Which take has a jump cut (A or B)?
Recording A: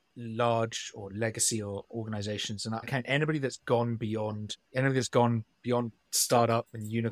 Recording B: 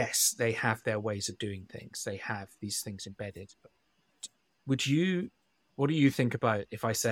A